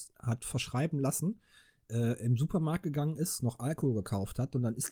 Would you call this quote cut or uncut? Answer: uncut